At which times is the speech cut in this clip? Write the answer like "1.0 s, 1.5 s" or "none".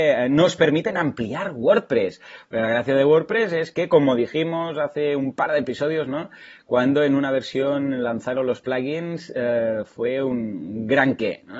none